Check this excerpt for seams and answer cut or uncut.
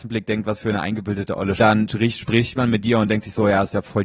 cut